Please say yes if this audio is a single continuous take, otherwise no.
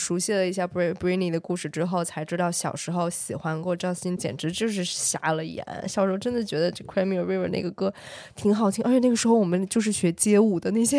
no